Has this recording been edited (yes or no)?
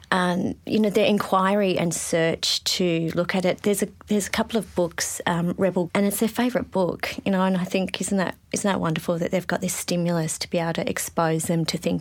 yes